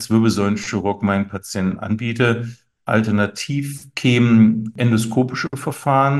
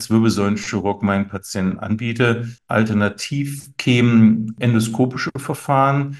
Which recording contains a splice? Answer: second; 1 cut; at 2.6 s

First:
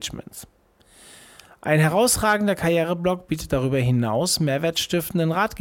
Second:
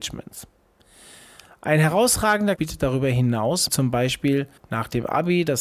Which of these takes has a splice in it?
second; 3 cuts; at 2.6 s, 3.7 s, 4.6 s

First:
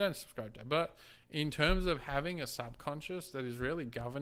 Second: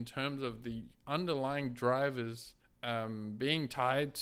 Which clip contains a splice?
second; 1 cut; at 2.6 s

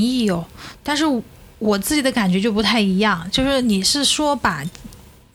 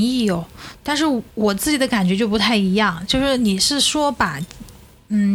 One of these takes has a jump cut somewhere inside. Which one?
second; 1 cut; at 1.3 s

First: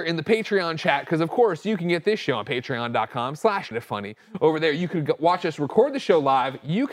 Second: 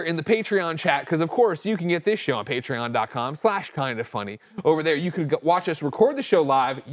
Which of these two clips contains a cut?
first; 1 cut; at 3.7 s

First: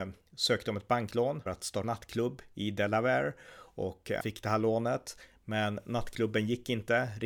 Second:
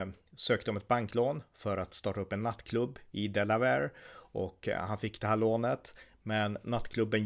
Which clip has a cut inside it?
first; 3 cuts; at 1.5 s, 1.8 s, 4.2 s

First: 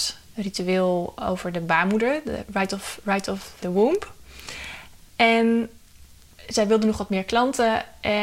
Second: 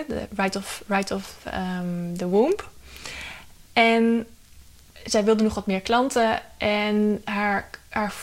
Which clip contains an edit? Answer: first; 1 cut; at 3.6 s

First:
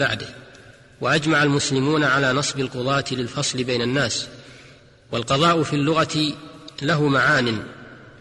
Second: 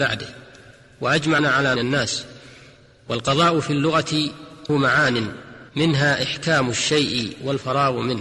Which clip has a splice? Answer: second; 4 cuts; at 1.4 s, 1.8 s, 4.7 s, 5.7 s

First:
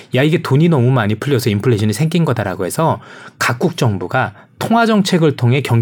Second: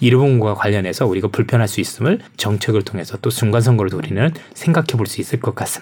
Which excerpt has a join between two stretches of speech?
second; 2 cuts; at 2.3 s, 3.9 s

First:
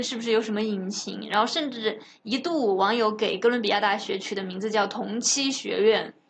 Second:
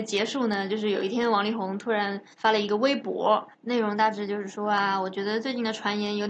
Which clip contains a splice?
second; 2 cuts; at 2.3 s, 3.5 s

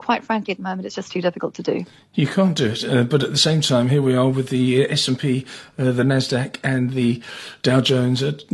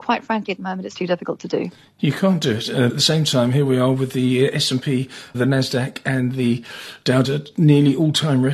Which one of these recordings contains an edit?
second; 4 cuts; at 0.9 s, 2.9 s, 5.3 s, 7.2 s

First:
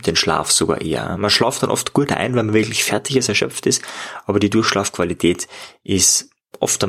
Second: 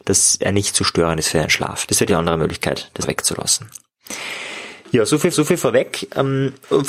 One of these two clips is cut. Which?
second; 3 cuts; at 2.1 s, 3.0 s, 5.3 s

